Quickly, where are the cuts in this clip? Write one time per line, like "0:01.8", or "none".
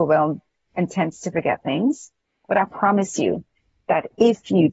none